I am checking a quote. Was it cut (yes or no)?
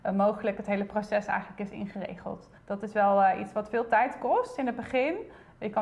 yes